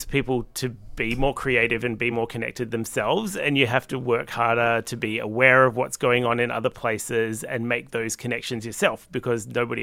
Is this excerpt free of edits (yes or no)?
yes